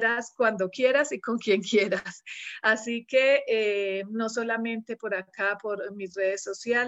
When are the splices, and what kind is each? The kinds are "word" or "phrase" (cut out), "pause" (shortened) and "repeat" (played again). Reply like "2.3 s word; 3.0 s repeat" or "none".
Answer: none